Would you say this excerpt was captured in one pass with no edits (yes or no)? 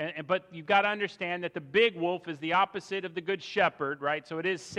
yes